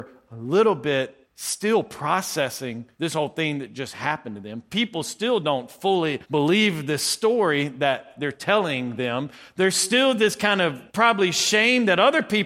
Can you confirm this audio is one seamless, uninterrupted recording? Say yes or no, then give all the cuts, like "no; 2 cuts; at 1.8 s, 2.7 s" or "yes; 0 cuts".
no; 4 cuts; at 1.2 s, 2.9 s, 6.2 s, 10.9 s